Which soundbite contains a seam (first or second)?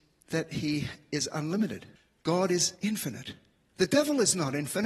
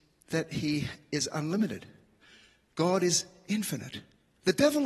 first